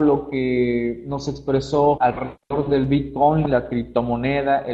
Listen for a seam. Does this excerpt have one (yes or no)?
yes